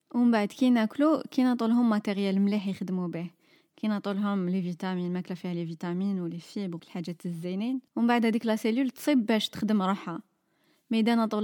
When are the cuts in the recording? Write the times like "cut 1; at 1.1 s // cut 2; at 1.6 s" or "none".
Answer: cut 1; at 6.8 s // cut 2; at 7.9 s